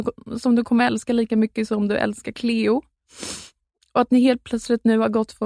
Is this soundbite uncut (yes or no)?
yes